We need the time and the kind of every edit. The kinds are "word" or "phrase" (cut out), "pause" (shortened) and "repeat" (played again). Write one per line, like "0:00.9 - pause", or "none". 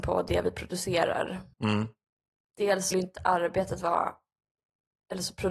0:01.5 - pause
0:02.9 - word